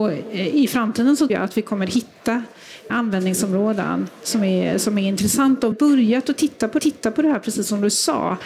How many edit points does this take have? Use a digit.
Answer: 4